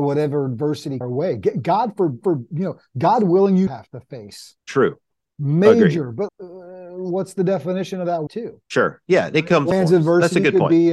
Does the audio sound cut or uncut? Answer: cut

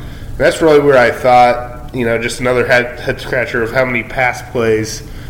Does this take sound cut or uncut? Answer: uncut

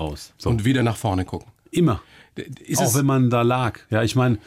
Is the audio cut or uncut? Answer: cut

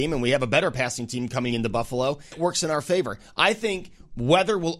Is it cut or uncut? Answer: cut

